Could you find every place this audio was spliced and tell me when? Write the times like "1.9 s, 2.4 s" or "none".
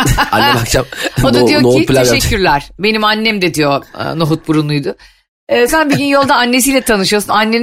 5.7 s